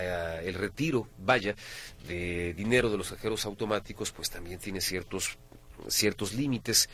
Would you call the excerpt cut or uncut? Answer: uncut